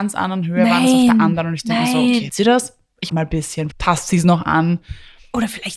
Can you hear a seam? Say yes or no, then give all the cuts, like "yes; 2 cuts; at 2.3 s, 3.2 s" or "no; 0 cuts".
yes; 3 cuts; at 2.3 s, 3.1 s, 3.7 s